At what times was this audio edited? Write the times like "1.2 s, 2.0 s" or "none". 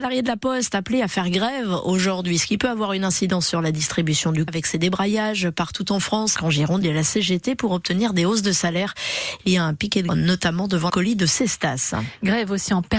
4.5 s, 6.4 s, 6.8 s, 10.1 s, 10.9 s